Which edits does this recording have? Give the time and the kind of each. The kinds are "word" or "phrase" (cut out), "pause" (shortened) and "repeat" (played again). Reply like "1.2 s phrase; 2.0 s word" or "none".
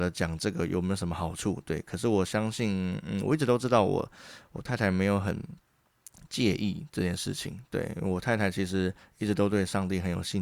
none